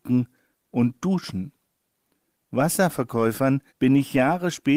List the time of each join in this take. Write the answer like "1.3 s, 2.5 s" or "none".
3.7 s